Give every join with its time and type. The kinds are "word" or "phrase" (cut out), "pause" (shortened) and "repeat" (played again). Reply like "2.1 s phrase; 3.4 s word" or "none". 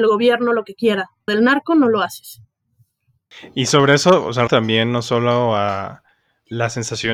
1.3 s word; 4.5 s word

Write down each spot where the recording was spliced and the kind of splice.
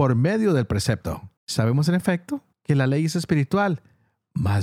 1.4 s pause

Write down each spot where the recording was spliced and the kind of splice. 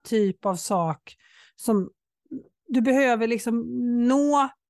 none

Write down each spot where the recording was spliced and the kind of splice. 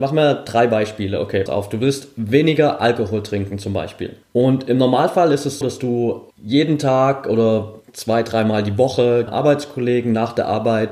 1.5 s word; 4.2 s pause; 5.6 s word; 6.3 s pause; 7.8 s pause; 9.3 s phrase

